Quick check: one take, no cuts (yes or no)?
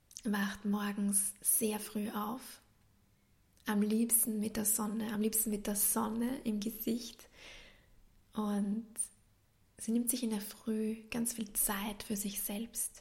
yes